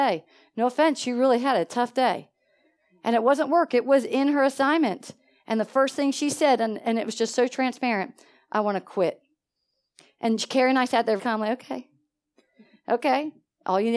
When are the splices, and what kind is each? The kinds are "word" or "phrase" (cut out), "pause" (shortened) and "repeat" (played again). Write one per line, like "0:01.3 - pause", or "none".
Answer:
0:11.2 - word